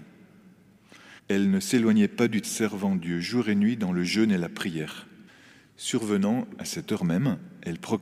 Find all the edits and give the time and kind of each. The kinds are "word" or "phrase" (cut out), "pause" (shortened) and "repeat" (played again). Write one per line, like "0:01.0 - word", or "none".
0:01.2 - pause
0:02.4 - word
0:05.3 - pause